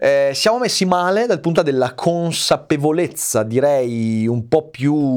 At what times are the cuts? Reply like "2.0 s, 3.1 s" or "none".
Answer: 1.5 s